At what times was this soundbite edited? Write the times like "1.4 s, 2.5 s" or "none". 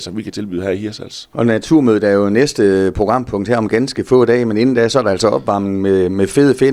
none